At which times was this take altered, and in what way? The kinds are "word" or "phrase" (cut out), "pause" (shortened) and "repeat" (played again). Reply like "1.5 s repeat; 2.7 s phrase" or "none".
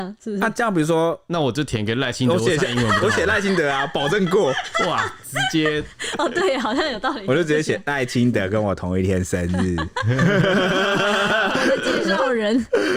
none